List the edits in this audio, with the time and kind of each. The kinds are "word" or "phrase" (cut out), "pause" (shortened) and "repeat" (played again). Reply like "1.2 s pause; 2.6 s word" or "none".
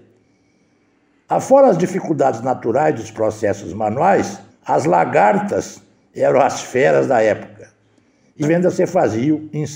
4.5 s pause; 8.4 s word